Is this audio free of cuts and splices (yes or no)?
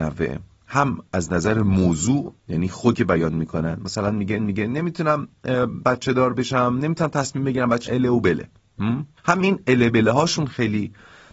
no